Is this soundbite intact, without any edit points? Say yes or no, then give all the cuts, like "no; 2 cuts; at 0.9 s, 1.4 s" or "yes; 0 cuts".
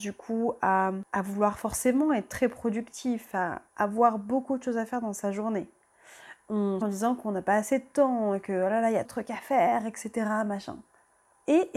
no; 3 cuts; at 3.7 s, 6.8 s, 9.0 s